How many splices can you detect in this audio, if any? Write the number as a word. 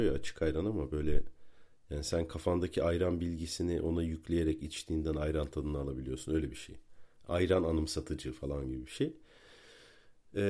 zero